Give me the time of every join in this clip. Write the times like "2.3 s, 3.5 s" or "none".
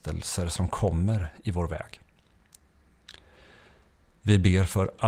none